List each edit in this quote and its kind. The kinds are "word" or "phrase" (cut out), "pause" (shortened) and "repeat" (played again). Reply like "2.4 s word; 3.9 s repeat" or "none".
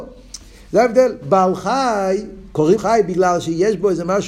2.8 s word